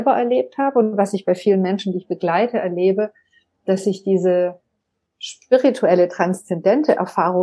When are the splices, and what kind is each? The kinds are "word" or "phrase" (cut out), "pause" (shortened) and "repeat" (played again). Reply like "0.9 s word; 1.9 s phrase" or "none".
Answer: none